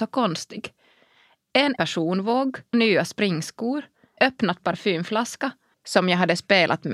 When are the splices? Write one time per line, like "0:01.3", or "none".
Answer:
0:01.8
0:02.7
0:04.2
0:05.7